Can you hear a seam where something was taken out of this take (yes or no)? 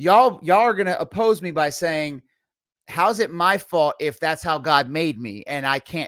no